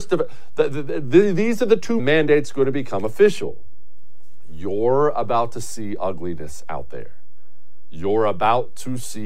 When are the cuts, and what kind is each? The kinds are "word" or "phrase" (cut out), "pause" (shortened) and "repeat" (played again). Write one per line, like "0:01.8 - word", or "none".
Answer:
0:02.0 - phrase